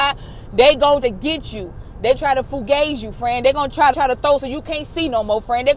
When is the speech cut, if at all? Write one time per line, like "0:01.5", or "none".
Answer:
0:01.0
0:02.2
0:03.9
0:04.4